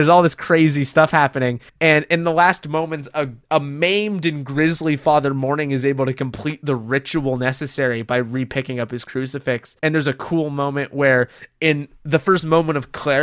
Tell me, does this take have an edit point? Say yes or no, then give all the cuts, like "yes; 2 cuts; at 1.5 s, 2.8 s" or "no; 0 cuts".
yes; 3 cuts; at 1.7 s, 3.4 s, 9.8 s